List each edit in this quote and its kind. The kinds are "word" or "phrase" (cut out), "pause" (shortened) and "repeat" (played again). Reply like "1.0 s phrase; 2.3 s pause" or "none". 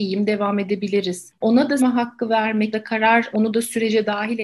1.4 s word; 1.8 s word; 2.7 s word; 3.3 s word